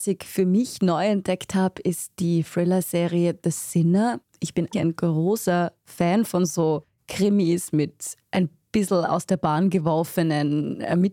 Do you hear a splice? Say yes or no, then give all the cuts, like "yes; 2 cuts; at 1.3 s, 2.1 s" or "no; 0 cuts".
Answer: yes; 1 cut; at 4.7 s